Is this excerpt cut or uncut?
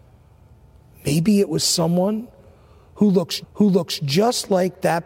cut